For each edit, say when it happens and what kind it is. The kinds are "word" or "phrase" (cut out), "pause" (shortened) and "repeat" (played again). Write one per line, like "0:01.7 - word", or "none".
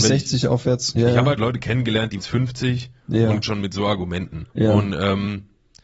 0:01.4 - word
0:02.2 - phrase
0:03.4 - word
0:04.5 - pause